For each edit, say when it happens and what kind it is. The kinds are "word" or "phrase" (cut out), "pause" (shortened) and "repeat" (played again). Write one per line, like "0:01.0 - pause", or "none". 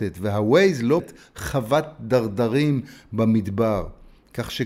0:01.0 - word

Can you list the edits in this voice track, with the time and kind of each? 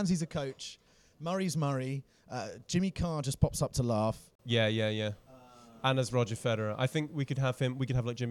none

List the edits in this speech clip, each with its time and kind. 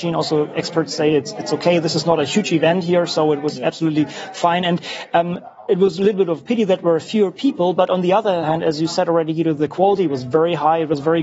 none

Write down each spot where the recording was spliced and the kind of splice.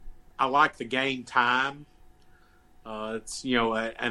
none

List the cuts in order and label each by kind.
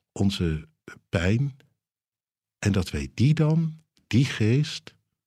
none

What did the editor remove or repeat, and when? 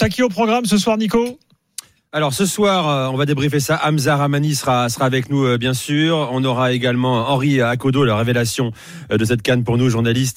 none

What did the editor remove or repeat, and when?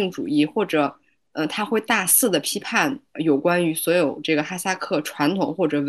none

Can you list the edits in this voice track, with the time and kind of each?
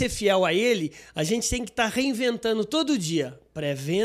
none

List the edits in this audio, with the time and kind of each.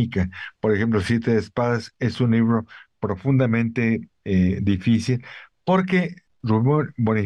none

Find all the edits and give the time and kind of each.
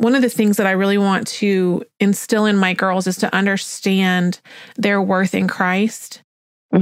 none

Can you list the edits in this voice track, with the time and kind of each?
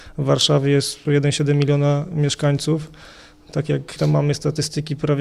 0:01.0 - word
0:04.0 - word

